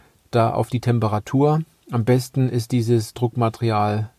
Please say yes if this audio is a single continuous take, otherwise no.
yes